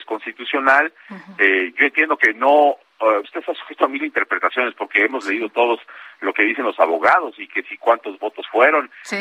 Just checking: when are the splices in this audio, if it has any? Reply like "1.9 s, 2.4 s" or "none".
3.2 s